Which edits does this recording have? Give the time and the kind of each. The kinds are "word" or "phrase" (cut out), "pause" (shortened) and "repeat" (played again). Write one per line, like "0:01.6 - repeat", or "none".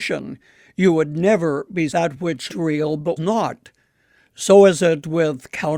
0:01.9 - phrase
0:02.5 - word
0:03.2 - word